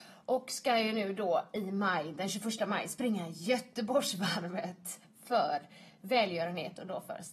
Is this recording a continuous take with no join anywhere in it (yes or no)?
yes